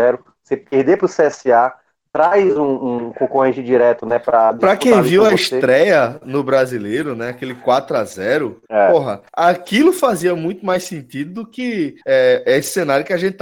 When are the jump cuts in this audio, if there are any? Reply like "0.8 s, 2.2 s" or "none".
8.7 s, 9.3 s, 12.0 s